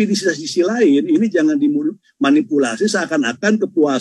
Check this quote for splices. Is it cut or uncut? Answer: uncut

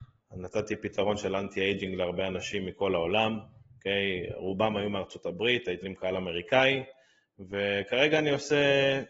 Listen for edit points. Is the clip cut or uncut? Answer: cut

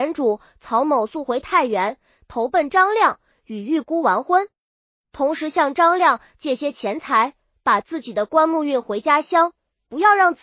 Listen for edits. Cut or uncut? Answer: uncut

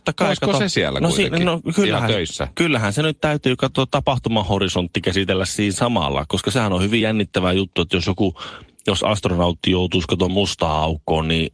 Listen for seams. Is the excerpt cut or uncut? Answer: uncut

